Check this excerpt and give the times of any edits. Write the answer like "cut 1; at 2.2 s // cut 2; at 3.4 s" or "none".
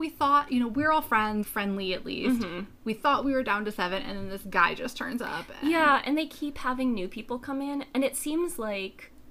cut 1; at 1.4 s